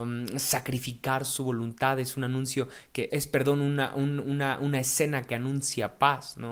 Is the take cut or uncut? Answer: cut